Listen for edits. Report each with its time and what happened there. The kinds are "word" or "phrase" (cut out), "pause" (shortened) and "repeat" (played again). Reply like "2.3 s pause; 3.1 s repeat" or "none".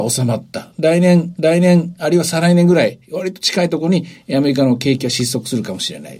1.4 s repeat